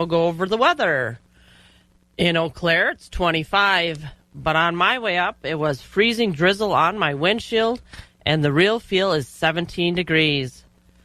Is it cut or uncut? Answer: uncut